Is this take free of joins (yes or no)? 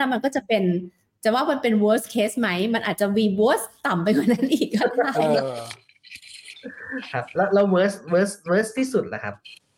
yes